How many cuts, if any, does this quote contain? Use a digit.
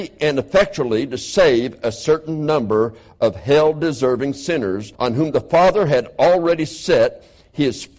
1